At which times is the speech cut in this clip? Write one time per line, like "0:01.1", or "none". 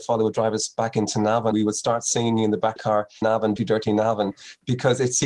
0:01.5
0:02.8
0:03.2
0:03.6